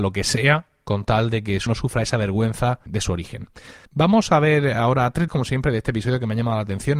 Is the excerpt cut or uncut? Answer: cut